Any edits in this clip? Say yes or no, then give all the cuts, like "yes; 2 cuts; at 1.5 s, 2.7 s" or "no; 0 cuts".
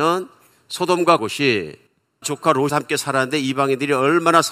yes; 3 cuts; at 1.2 s, 2.2 s, 2.7 s